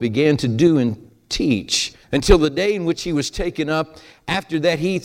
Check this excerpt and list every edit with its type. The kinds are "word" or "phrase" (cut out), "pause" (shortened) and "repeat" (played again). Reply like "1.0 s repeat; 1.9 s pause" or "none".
2.0 s pause